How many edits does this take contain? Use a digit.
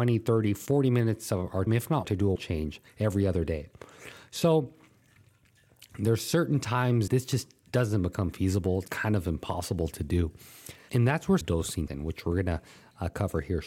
8